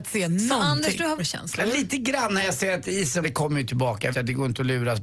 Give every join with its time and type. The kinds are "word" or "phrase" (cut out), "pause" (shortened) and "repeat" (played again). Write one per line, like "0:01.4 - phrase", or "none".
0:01.2 - word
0:03.2 - word
0:04.1 - word